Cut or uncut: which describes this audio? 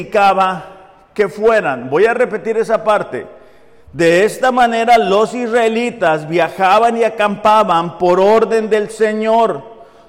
uncut